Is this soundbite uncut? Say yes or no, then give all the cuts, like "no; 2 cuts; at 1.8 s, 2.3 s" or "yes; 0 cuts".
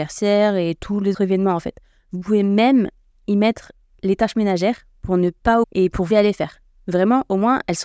no; 3 cuts; at 1.1 s, 5.6 s, 6.1 s